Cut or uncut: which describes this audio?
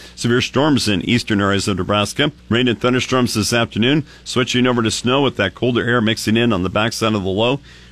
cut